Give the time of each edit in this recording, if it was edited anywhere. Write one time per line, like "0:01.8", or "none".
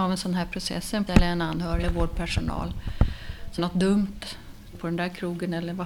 0:01.1
0:01.8
0:03.6
0:04.7